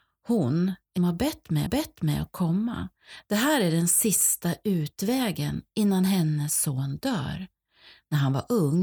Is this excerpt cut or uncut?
cut